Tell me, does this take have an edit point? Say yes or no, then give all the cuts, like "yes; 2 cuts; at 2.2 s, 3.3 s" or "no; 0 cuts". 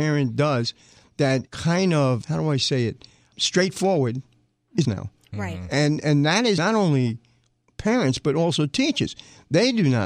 yes; 6 cuts; at 1.5 s, 2.2 s, 3.3 s, 4.8 s, 6.0 s, 6.6 s